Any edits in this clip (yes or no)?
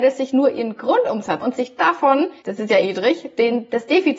yes